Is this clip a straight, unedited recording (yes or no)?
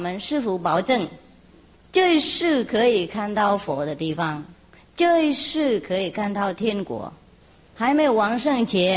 yes